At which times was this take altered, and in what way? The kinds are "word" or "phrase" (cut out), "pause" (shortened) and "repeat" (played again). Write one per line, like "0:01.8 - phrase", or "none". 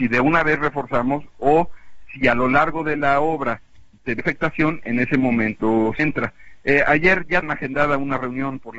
0:04.2 - word
0:06.0 - word
0:07.4 - word